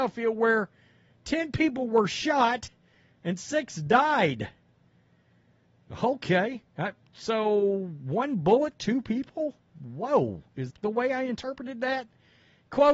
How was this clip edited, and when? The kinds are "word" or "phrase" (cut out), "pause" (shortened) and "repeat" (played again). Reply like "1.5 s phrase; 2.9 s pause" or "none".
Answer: 8.8 s word; 10.7 s word